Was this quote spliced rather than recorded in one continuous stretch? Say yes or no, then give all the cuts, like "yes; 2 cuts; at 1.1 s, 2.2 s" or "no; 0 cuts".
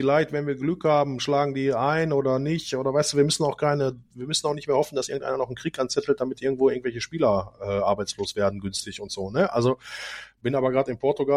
no; 0 cuts